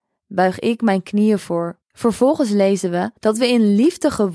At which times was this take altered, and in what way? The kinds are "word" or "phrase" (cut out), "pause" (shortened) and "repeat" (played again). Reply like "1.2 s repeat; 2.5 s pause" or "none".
1.8 s pause; 3.2 s pause